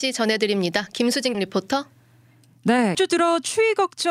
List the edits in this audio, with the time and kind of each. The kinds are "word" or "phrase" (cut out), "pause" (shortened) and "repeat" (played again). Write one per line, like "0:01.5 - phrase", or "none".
0:01.3 - word
0:02.9 - word

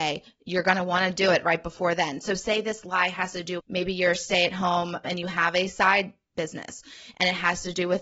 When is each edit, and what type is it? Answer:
0:03.6 - word
0:05.0 - word

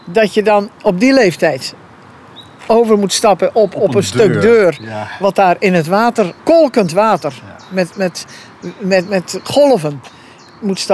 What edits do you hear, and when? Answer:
0:06.4 - pause

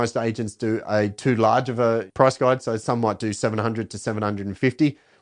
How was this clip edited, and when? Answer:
none

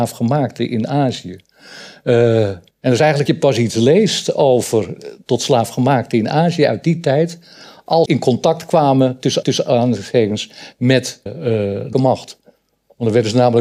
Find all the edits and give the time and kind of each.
0:02.7 - pause
0:03.3 - phrase
0:08.1 - word
0:09.4 - repeat
0:11.3 - word
0:11.9 - word

